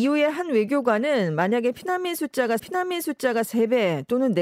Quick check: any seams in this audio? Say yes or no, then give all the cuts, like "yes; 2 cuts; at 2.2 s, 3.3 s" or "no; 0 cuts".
yes; 1 cut; at 2.6 s